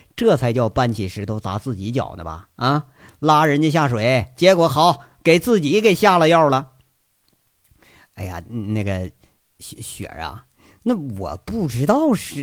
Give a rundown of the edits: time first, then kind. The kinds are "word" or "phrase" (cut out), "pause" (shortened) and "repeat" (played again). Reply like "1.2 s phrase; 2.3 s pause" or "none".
4.3 s word